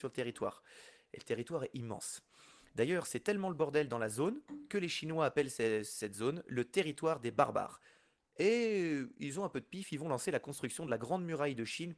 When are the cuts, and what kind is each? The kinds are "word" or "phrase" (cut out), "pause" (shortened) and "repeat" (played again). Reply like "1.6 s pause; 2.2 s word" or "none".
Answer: none